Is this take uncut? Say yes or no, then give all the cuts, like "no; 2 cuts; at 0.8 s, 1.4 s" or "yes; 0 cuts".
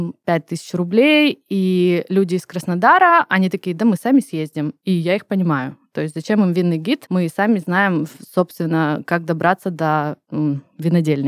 yes; 0 cuts